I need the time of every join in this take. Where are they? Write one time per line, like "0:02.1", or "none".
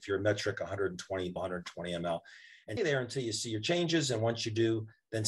0:01.4
0:02.8